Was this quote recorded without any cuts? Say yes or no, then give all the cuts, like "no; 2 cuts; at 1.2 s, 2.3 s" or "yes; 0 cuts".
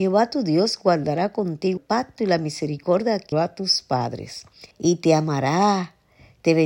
no; 3 cuts; at 1.8 s, 3.3 s, 4.7 s